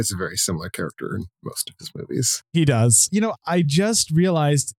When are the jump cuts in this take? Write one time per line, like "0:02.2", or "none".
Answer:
none